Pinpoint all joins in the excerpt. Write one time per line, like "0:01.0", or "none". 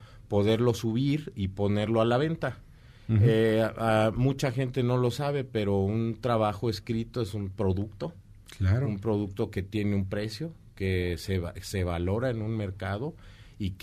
none